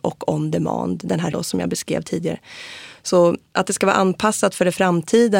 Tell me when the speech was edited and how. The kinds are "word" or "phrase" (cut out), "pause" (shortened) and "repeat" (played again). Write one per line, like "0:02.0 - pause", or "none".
0:01.3 - word